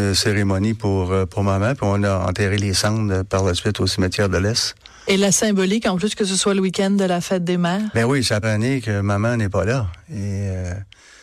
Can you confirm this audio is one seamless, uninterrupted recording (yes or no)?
no